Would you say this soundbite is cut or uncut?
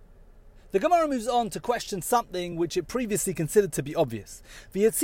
uncut